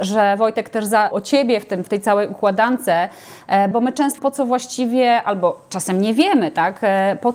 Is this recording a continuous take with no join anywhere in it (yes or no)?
no